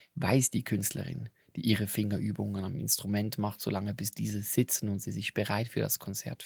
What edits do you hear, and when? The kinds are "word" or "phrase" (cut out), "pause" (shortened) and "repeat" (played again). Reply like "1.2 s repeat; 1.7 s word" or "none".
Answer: none